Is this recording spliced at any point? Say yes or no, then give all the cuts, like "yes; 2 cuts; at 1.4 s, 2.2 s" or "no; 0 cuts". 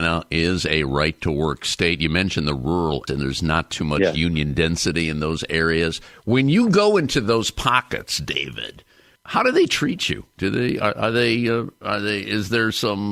yes; 2 cuts; at 3.1 s, 9.2 s